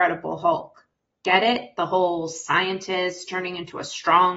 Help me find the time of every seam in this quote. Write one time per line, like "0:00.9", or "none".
none